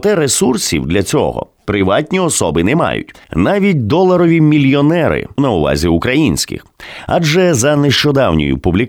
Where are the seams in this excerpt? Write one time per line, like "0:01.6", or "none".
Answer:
0:03.2
0:05.4